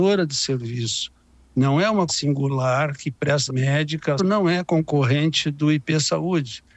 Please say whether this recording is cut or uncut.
cut